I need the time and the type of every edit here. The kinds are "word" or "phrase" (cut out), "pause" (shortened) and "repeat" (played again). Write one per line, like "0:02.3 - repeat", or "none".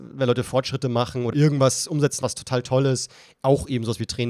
0:01.3 - word
0:02.2 - word